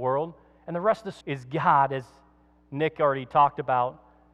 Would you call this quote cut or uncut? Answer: cut